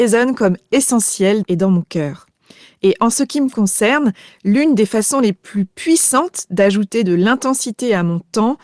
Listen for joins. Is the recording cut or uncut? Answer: cut